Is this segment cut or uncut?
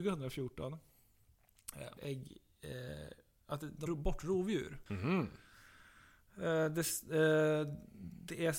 cut